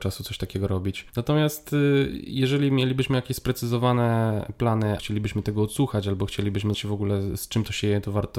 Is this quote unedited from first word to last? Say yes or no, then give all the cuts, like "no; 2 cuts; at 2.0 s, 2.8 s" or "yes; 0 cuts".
no; 3 cuts; at 1.1 s, 5.0 s, 6.7 s